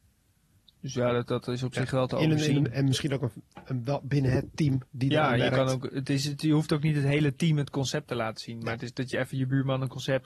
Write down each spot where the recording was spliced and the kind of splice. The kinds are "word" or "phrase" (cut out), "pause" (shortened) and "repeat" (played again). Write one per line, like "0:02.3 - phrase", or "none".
none